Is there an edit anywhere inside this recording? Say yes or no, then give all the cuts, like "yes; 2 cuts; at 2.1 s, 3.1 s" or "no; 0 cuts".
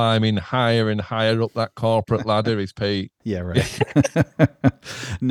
no; 0 cuts